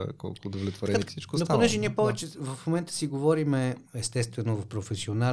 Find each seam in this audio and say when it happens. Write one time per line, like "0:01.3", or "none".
0:01.1
0:03.8